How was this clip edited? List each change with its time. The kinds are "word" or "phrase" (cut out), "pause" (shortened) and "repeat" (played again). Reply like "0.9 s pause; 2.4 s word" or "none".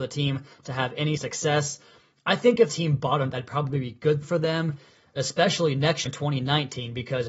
1.2 s word; 2.7 s word; 3.3 s word; 4.2 s word; 6.1 s word